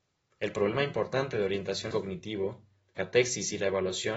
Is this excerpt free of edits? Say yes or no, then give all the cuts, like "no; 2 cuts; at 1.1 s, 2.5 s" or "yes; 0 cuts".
no; 2 cuts; at 1.9 s, 3.0 s